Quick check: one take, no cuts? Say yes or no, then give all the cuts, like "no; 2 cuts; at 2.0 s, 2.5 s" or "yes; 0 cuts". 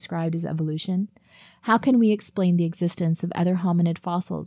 yes; 0 cuts